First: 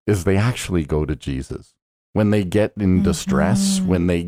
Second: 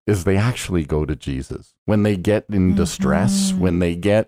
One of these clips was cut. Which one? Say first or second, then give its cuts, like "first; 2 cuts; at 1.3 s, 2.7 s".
second; 1 cut; at 1.8 s